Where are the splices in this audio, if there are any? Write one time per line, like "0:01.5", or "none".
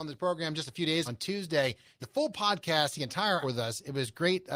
0:01.0
0:02.0
0:02.9
0:03.4